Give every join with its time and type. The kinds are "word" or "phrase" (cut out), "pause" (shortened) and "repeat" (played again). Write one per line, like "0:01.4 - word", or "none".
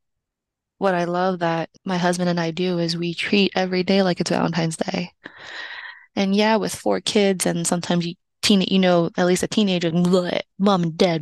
0:01.8 - pause
0:09.9 - word